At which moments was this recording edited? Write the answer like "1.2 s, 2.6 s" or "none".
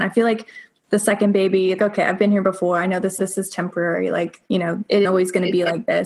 1.8 s, 3.2 s, 4.5 s, 5.0 s